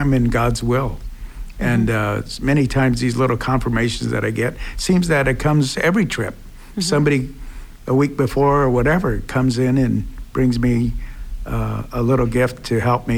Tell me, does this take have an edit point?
no; 0 cuts

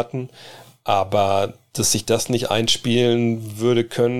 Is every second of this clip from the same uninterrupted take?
yes; 0 cuts

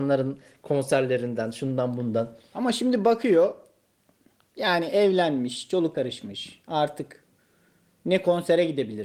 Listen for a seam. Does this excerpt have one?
yes; 1 cut; at 5.9 s

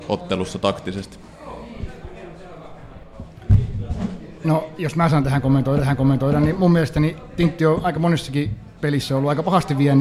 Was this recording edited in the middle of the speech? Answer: yes; 2 cuts; at 5.8 s, 8.8 s

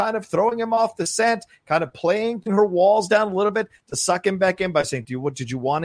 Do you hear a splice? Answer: yes; 1 cut; at 2.5 s

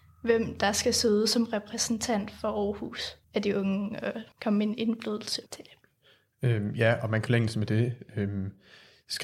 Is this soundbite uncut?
no; 4 cuts; at 3.2 s, 4.3 s, 5.5 s, 7.3 s

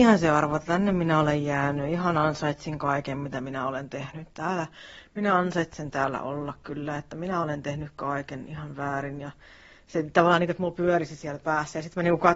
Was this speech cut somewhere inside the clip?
no; 0 cuts

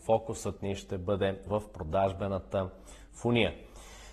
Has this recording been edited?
yes; 1 cut; at 1.5 s

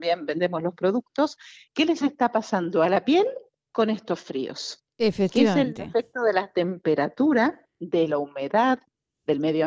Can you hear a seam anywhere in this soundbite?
yes; 1 cut; at 3.5 s

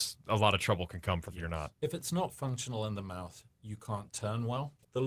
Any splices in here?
yes; 1 cut; at 1.3 s

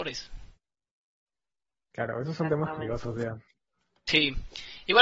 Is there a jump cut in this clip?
no; 0 cuts

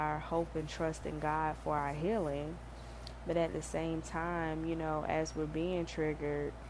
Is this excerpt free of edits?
yes; 0 cuts

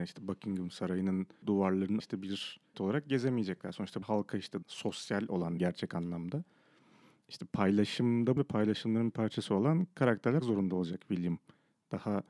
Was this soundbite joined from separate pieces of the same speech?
yes; 8 cuts; at 1.4 s, 2.0 s, 2.7 s, 4.0 s, 4.6 s, 5.6 s, 8.4 s, 10.4 s

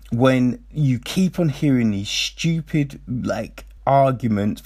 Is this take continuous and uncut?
no; 1 cut; at 3.8 s

